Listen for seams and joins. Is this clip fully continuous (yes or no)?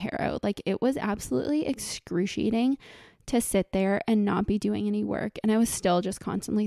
yes